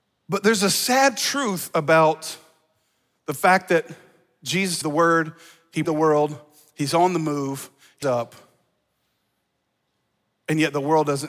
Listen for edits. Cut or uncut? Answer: cut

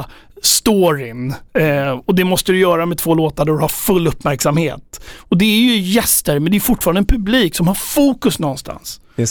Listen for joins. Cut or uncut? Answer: cut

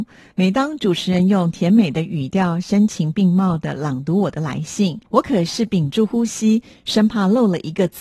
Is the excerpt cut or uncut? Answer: cut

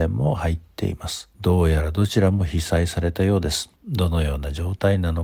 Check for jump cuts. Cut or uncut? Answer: cut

